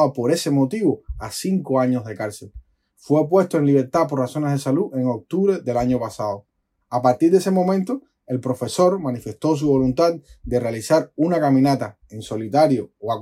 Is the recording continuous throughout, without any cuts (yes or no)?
yes